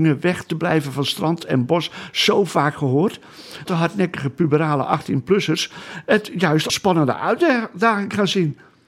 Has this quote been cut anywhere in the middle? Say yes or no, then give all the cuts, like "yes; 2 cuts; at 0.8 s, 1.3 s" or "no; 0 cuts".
yes; 2 cuts; at 3.7 s, 6.7 s